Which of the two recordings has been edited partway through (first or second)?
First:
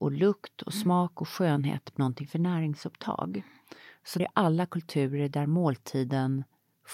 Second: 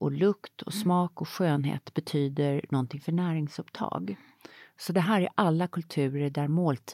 first